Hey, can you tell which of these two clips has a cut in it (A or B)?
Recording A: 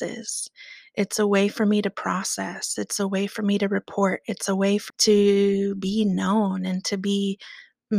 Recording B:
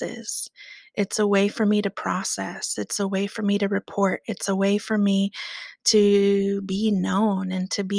A